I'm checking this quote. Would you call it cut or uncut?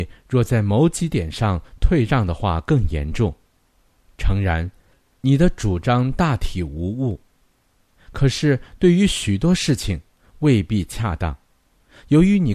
uncut